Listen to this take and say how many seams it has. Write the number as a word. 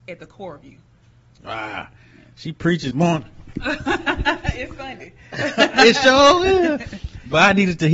one